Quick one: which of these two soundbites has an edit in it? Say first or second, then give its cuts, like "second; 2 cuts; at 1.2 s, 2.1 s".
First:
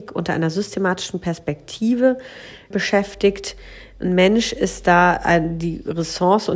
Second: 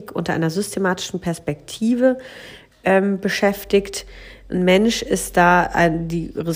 first; 1 cut; at 2.7 s